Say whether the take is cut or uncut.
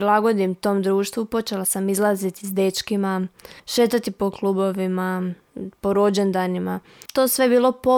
cut